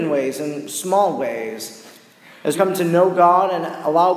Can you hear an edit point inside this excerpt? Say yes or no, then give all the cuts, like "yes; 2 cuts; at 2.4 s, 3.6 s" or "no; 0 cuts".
yes; 1 cut; at 2.5 s